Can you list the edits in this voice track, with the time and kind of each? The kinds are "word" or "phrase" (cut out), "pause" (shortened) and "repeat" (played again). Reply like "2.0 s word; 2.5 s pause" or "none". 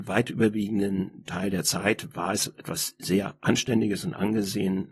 none